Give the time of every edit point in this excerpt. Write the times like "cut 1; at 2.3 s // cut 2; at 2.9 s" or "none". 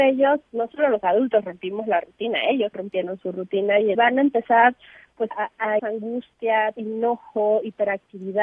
cut 1; at 2.7 s // cut 2; at 3.2 s // cut 3; at 3.9 s // cut 4; at 5.3 s // cut 5; at 5.8 s // cut 6; at 6.7 s